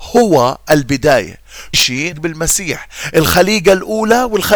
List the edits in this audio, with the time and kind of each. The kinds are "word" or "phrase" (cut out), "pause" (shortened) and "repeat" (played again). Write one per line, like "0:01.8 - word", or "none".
0:01.7 - word
0:02.1 - word